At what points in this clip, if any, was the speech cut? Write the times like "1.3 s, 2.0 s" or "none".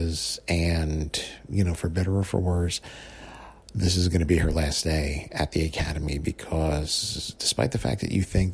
none